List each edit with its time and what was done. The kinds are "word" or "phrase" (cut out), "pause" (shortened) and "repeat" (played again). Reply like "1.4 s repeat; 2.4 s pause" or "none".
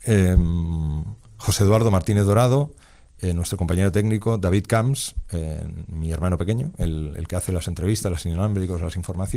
none